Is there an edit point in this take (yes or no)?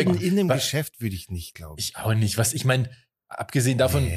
no